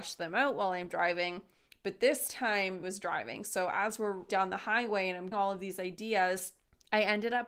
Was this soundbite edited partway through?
yes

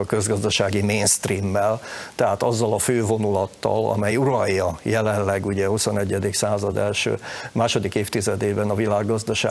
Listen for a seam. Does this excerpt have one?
no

